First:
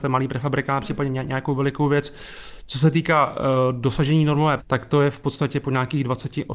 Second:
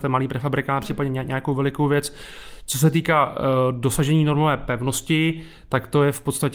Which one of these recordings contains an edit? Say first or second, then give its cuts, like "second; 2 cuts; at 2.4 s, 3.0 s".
first; 1 cut; at 4.6 s